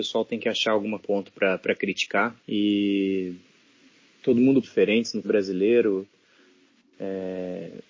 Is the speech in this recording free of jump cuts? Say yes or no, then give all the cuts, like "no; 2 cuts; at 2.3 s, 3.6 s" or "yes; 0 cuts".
no; 4 cuts; at 1.0 s, 2.4 s, 4.6 s, 5.2 s